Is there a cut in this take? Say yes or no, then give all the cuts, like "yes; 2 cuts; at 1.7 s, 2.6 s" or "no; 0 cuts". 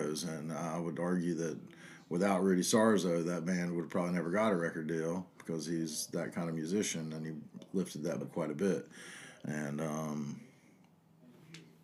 yes; 1 cut; at 8.2 s